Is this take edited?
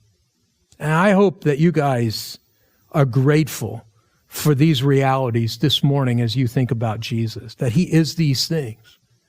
no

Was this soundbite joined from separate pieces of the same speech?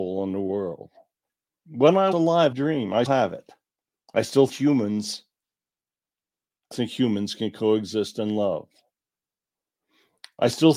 yes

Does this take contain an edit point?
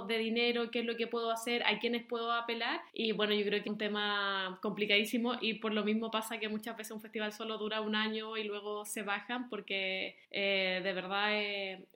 yes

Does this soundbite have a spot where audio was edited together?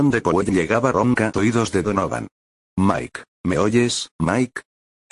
yes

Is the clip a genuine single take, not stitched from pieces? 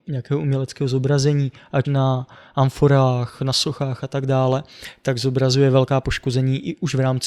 no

